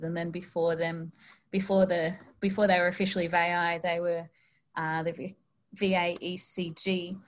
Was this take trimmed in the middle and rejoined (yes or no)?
no